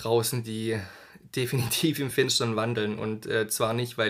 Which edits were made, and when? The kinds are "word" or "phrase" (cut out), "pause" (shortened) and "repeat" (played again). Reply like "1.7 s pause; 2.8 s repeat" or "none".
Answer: none